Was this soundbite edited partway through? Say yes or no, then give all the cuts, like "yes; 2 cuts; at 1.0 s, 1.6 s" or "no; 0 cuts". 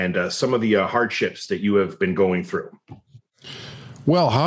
no; 0 cuts